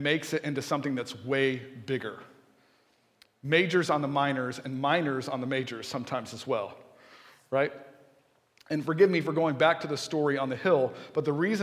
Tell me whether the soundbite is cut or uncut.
uncut